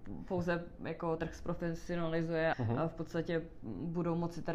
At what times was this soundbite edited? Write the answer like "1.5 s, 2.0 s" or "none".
1.2 s, 2.5 s